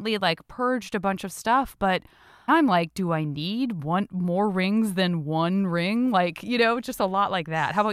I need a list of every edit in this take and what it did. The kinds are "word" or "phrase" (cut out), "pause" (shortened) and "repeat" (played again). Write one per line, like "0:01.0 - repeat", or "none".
0:02.5 - word